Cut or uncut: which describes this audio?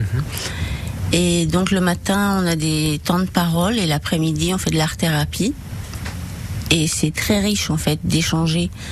uncut